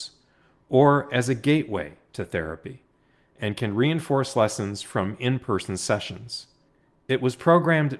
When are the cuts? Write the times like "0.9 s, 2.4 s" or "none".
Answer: none